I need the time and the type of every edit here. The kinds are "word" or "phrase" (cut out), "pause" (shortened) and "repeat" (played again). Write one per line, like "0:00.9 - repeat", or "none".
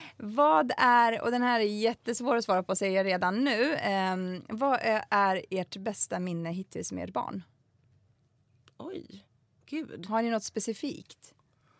none